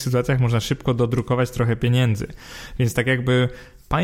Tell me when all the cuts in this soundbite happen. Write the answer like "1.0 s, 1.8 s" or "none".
none